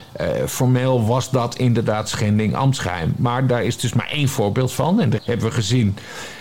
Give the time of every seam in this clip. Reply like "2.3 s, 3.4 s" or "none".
5.2 s

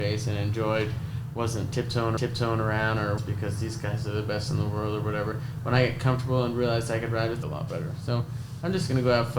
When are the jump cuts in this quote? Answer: 2.2 s, 3.2 s, 7.4 s

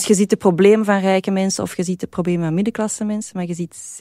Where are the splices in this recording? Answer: none

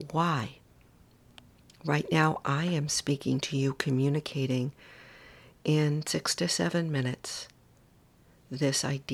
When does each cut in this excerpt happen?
none

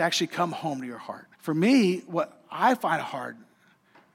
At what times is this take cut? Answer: 1.3 s

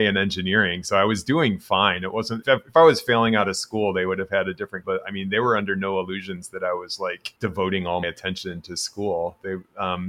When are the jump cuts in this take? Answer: 2.4 s, 4.8 s, 7.4 s, 8.0 s

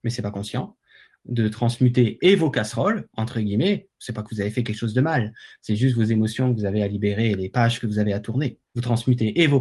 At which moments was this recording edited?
8.7 s

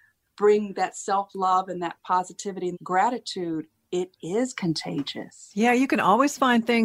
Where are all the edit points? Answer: 2.7 s

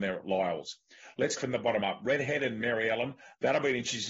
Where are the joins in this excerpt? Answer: 1.4 s

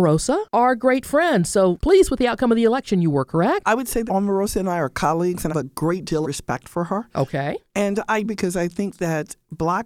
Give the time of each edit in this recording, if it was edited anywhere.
1.8 s, 4.1 s, 5.5 s, 6.2 s, 8.2 s

